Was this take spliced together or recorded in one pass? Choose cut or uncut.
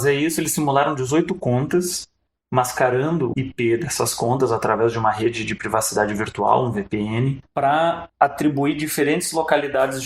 cut